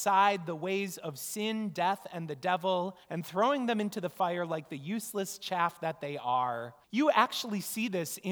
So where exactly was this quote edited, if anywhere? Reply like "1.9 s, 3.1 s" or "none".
3.0 s, 6.8 s